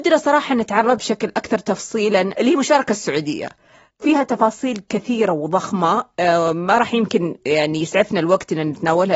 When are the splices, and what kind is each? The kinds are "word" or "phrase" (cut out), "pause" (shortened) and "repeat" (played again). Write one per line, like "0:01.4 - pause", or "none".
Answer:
0:01.0 - word